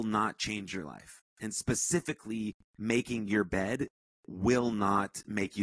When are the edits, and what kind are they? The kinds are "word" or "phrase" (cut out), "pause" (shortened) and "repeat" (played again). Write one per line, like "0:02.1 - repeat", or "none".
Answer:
0:02.6 - pause